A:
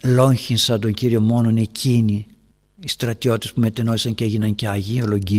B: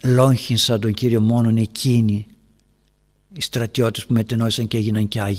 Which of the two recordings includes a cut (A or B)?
A